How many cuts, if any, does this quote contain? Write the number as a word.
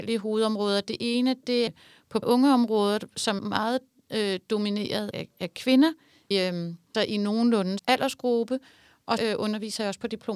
eight